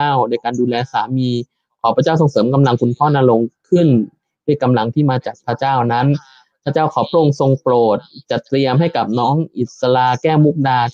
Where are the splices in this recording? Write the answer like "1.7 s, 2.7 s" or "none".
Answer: none